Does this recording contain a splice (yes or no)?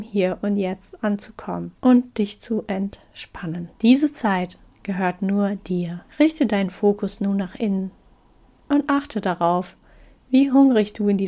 yes